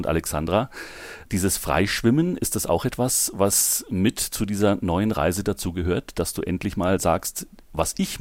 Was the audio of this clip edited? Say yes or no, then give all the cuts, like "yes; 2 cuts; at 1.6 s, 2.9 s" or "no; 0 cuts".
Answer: no; 0 cuts